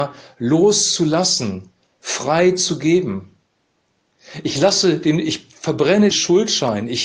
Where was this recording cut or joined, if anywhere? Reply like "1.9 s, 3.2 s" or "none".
6.1 s